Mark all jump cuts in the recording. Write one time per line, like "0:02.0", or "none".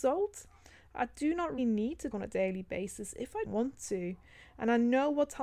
0:01.6
0:02.1
0:03.4